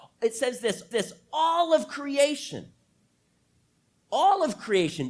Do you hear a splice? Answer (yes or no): yes